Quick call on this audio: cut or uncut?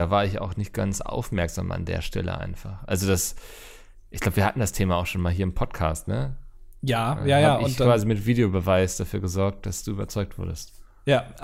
uncut